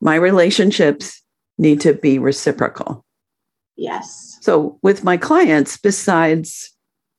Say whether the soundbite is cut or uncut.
uncut